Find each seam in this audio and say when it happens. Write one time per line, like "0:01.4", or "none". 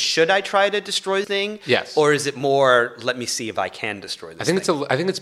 0:01.2